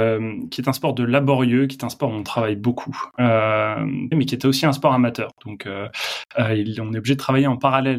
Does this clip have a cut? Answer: yes; 1 cut; at 4.1 s

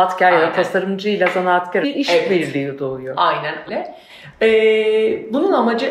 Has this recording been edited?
yes; 2 cuts; at 1.8 s, 3.7 s

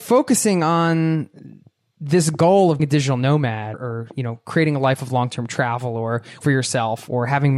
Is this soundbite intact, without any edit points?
no; 3 cuts; at 2.8 s, 3.7 s, 6.4 s

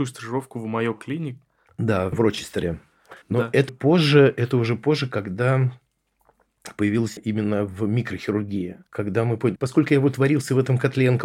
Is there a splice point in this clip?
yes; 7 cuts; at 1.7 s, 2.1 s, 3.2 s, 3.7 s, 7.2 s, 8.9 s, 9.6 s

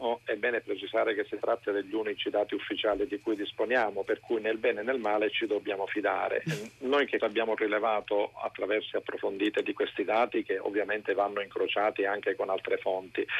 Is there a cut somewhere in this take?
yes; 2 cuts; at 7.2 s, 8.9 s

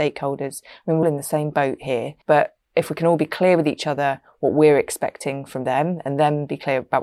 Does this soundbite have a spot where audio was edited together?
yes; 2 cuts; at 1.0 s, 2.2 s

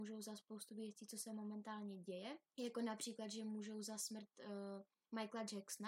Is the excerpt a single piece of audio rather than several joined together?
no; 1 cut; at 2.5 s

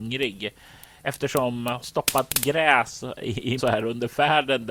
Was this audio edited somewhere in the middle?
yes; 2 cuts; at 1.8 s, 3.6 s

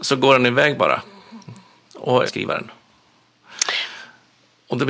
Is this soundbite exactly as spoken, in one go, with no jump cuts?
no; 1 cut; at 2.3 s

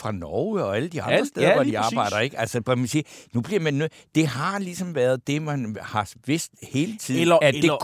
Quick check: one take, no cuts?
yes; 0 cuts

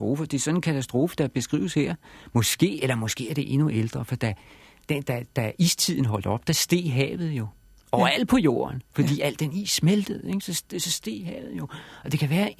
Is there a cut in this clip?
no; 0 cuts

